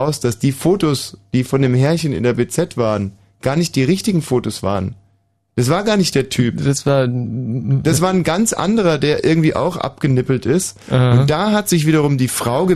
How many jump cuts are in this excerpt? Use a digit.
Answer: 0